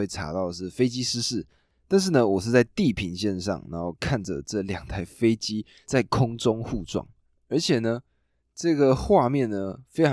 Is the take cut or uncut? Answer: uncut